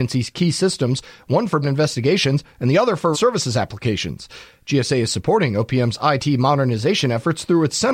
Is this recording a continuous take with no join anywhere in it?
no; 2 cuts; at 1.6 s, 3.1 s

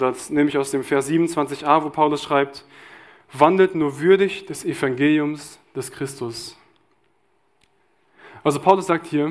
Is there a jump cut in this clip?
no; 0 cuts

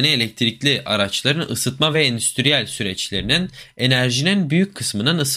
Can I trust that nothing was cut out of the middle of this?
yes; 0 cuts

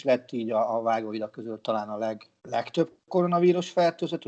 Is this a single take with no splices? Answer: no; 1 cut; at 2.4 s

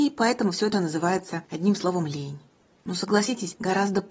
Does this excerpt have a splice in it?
no; 0 cuts

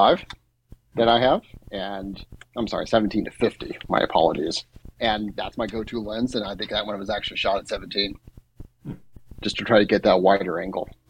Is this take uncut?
no; 1 cut; at 4.9 s

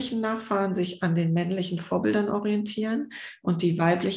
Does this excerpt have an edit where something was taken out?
no; 0 cuts

